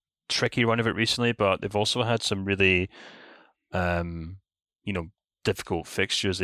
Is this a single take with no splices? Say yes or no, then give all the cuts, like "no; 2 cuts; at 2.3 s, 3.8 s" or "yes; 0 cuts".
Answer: yes; 0 cuts